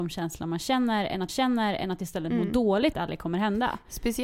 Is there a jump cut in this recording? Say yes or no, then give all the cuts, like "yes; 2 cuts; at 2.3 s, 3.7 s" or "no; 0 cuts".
yes; 2 cuts; at 1.3 s, 2.9 s